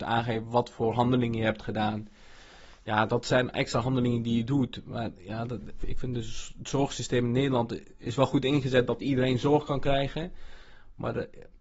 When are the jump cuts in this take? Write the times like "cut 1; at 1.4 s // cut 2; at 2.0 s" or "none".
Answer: cut 1; at 5.8 s